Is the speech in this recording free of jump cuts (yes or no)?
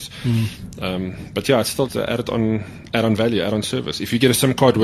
no